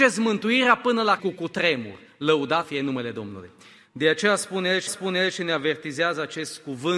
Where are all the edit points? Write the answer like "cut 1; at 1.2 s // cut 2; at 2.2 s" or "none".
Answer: cut 1; at 1.2 s // cut 2; at 2.6 s // cut 3; at 4.9 s